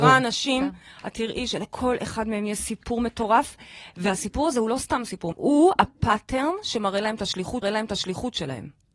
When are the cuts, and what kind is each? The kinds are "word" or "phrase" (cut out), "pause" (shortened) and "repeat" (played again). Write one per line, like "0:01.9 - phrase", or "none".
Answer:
0:05.3 - word
0:07.6 - repeat